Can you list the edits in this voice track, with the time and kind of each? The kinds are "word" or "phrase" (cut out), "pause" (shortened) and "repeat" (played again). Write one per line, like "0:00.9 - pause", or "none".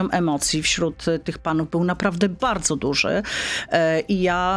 none